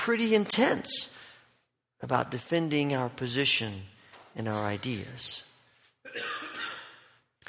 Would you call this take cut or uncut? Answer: uncut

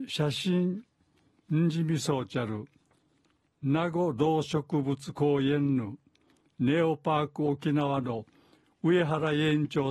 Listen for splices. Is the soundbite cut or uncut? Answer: uncut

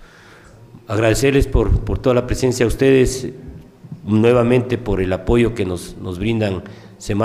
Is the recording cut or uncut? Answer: uncut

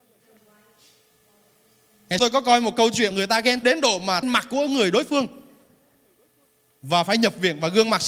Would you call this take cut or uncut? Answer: cut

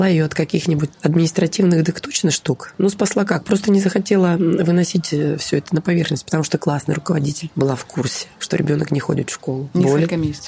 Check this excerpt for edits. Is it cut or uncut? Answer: uncut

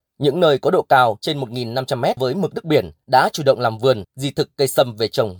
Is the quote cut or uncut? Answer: cut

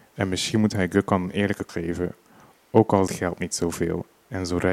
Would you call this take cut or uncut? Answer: cut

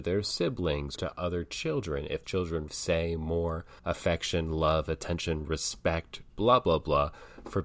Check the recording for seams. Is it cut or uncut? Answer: cut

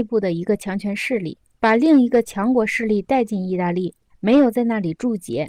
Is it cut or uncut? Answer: uncut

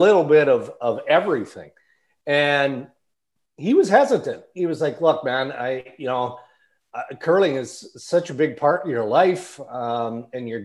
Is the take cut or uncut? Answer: uncut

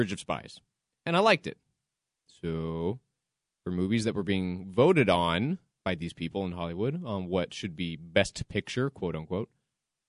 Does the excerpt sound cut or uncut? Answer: uncut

